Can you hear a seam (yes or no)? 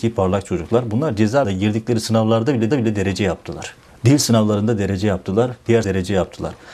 yes